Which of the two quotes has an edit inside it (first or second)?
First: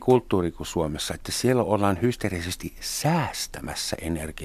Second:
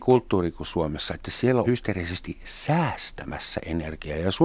second